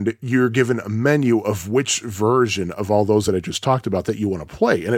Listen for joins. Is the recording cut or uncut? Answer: uncut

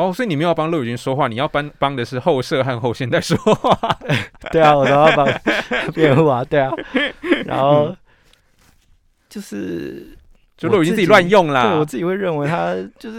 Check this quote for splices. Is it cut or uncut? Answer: uncut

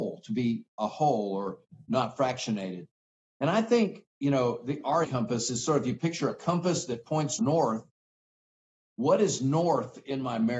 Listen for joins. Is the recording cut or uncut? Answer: cut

